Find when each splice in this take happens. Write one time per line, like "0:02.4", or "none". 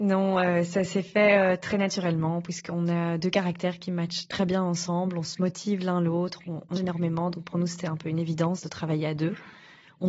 0:06.8